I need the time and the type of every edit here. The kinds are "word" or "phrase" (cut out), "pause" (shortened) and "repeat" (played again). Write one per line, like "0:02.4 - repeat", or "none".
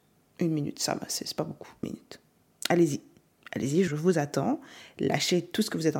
0:01.8 - word
0:03.9 - word